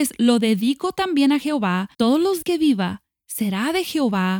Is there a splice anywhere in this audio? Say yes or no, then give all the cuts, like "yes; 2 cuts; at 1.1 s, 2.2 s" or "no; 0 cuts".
yes; 2 cuts; at 1.9 s, 2.4 s